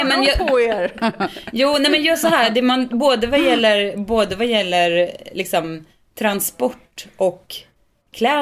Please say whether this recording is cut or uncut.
uncut